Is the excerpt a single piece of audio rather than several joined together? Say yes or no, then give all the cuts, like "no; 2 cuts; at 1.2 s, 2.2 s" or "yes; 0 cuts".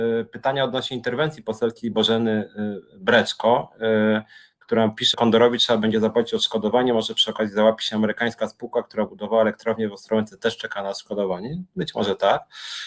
no; 1 cut; at 5.1 s